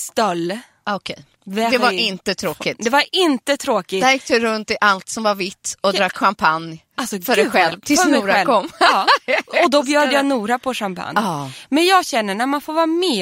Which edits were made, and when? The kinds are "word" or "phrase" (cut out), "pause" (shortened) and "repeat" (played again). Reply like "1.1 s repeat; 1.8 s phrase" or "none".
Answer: 1.4 s pause